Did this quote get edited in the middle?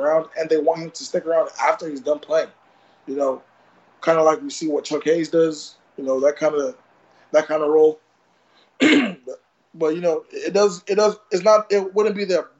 no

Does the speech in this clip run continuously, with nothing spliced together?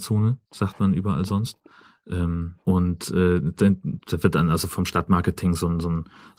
no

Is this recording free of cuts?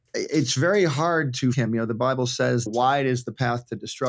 no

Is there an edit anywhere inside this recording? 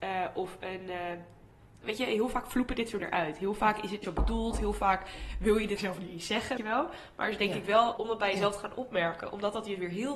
yes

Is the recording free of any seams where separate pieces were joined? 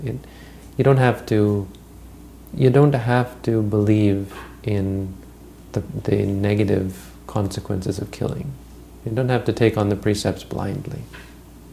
no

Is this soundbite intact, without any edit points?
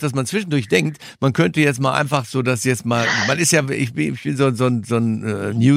yes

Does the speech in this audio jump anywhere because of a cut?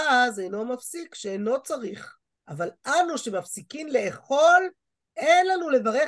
yes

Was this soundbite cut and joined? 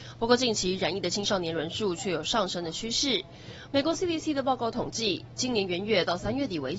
no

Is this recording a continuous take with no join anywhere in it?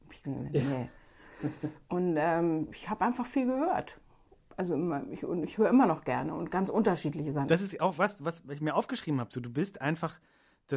yes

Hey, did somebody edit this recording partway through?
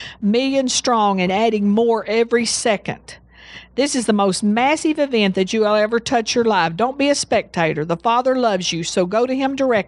no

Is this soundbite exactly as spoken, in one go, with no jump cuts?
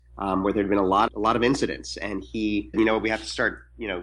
no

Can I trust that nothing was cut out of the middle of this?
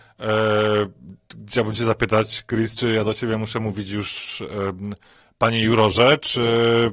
yes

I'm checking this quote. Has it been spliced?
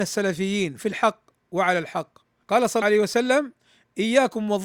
yes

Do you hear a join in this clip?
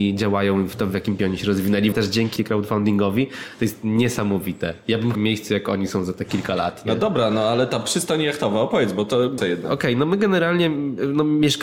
yes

